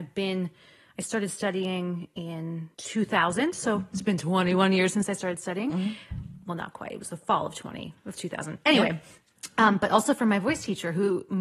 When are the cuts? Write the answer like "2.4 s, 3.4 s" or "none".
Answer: 2.7 s